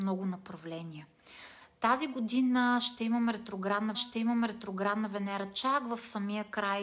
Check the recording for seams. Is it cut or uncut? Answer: cut